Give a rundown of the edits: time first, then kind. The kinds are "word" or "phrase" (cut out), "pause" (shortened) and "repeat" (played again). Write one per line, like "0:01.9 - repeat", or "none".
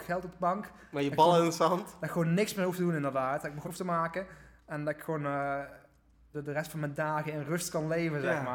0:03.6 - phrase
0:06.3 - word